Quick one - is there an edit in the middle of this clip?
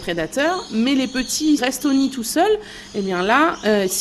yes; 1 cut; at 1.6 s

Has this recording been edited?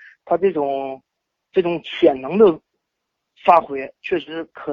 no; 0 cuts

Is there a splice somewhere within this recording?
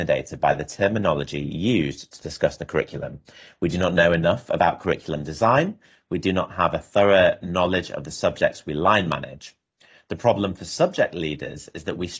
no; 0 cuts

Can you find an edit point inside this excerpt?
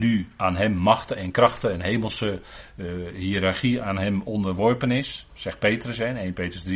no; 0 cuts

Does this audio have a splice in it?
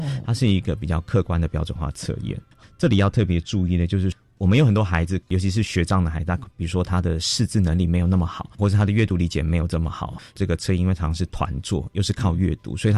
no; 0 cuts

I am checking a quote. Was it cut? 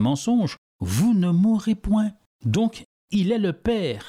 no; 0 cuts

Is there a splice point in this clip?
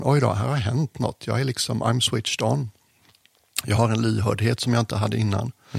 no; 0 cuts

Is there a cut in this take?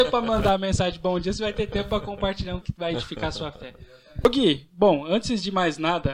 yes; 1 cut; at 2.6 s

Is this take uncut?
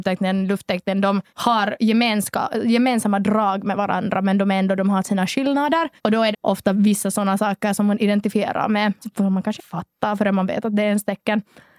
no; 5 cuts; at 1.3 s, 6.0 s, 6.3 s, 9.0 s, 9.6 s

